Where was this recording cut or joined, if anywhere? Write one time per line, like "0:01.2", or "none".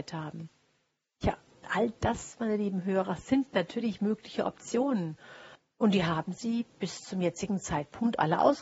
0:05.6